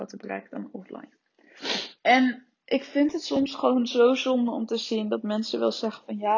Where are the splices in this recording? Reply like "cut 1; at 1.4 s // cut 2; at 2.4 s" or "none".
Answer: cut 1; at 2.0 s